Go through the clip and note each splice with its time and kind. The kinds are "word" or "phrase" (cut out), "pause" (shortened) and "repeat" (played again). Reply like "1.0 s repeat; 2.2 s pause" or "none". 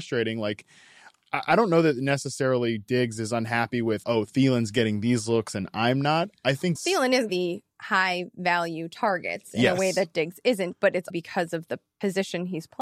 4.0 s word; 6.7 s word; 7.3 s word; 11.1 s word